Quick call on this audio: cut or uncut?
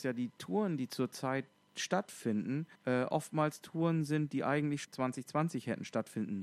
cut